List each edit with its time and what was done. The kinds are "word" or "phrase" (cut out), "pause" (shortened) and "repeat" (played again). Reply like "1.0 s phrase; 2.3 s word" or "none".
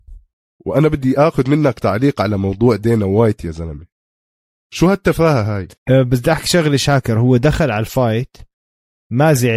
5.8 s pause